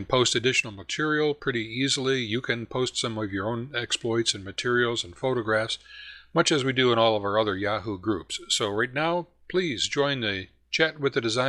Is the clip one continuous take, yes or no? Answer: yes